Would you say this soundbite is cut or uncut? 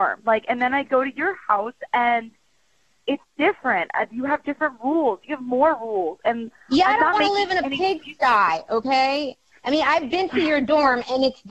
uncut